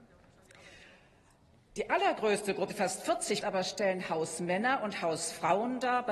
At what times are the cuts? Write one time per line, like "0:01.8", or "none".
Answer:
0:02.7
0:03.4